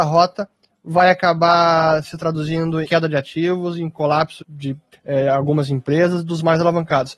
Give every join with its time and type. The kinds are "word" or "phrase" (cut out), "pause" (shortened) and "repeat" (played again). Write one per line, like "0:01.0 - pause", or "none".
0:02.8 - phrase
0:04.4 - word
0:04.9 - pause